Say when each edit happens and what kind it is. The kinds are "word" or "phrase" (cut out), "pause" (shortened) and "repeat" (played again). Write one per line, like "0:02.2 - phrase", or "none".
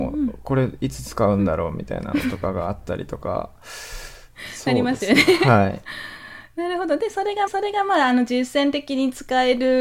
0:07.5 - repeat